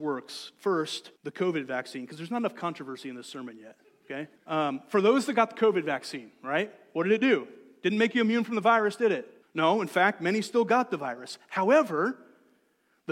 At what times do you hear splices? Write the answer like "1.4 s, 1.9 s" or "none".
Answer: 1.2 s, 4.4 s, 9.4 s